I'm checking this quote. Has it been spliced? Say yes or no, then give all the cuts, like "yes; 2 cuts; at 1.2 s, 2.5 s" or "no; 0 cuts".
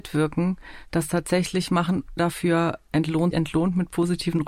yes; 2 cuts; at 2.2 s, 3.3 s